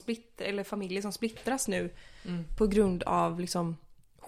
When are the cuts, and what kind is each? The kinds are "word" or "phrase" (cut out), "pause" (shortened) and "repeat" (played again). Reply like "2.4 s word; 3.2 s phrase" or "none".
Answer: none